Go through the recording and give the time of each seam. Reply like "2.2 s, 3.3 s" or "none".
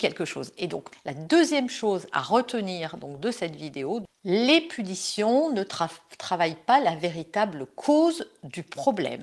none